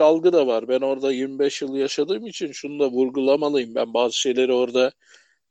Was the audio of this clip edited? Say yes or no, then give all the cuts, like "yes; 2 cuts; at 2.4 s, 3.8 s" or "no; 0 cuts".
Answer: no; 0 cuts